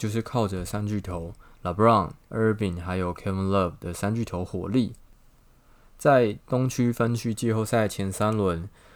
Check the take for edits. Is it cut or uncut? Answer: uncut